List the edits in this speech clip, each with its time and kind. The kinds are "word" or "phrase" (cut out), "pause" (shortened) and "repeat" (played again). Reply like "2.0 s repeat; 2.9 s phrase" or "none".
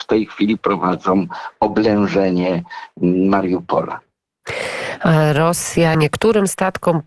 5.9 s phrase